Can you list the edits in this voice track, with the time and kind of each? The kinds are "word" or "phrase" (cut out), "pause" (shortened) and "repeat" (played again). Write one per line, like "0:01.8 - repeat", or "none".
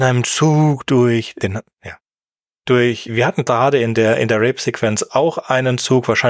none